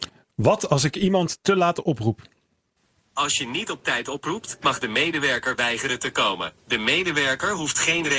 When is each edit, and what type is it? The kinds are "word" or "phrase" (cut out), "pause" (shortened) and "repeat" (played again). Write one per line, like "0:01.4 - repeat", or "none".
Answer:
0:06.6 - pause